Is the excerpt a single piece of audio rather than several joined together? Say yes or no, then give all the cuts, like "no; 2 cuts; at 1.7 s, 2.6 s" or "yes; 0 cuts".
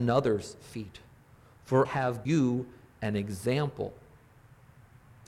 no; 2 cuts; at 1.8 s, 2.2 s